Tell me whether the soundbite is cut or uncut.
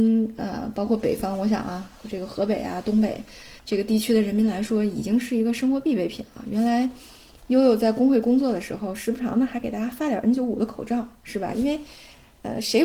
cut